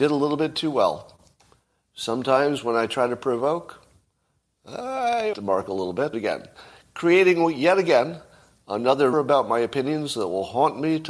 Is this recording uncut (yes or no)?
no